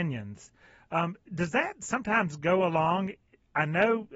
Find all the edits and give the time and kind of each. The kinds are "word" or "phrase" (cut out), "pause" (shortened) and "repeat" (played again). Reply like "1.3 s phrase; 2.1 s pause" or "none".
none